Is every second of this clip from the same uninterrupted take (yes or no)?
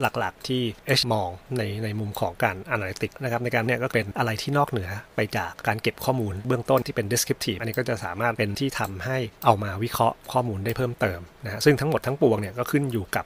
no